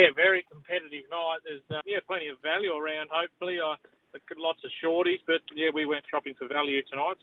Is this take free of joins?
no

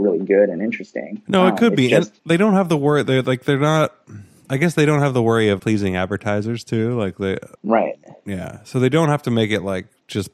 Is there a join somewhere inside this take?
yes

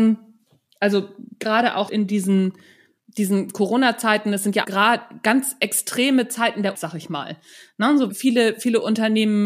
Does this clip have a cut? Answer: yes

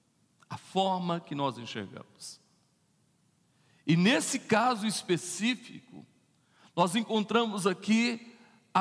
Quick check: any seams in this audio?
no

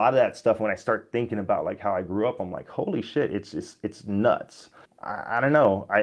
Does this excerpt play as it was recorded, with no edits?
yes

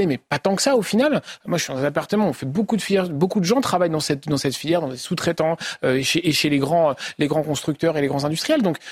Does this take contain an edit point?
no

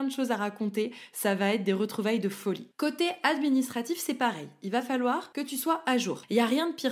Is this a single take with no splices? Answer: yes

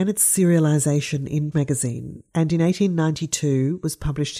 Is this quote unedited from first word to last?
no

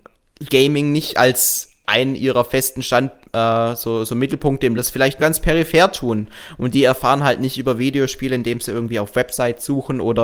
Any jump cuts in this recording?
yes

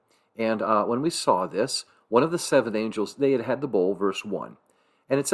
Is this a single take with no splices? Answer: yes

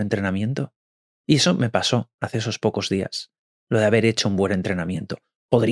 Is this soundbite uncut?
yes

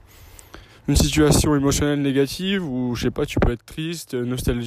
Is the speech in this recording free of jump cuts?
yes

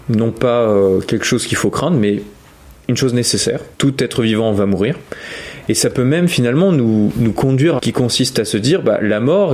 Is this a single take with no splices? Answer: no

